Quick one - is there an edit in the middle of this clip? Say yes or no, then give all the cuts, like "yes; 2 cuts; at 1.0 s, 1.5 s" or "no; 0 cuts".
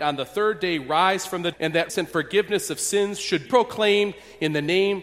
yes; 3 cuts; at 1.5 s, 1.9 s, 3.5 s